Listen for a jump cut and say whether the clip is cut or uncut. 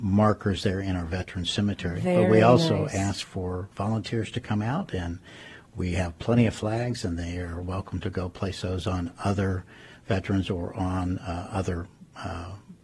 uncut